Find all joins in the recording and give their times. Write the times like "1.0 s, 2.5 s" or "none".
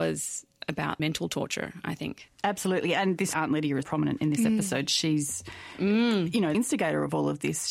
1.0 s, 3.3 s, 3.8 s, 6.5 s